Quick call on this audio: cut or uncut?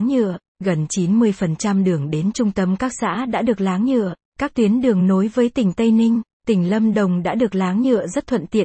uncut